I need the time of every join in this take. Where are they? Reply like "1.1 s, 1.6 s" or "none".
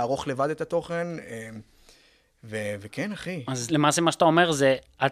3.7 s